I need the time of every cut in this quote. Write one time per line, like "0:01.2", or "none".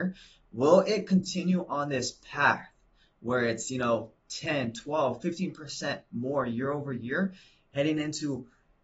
none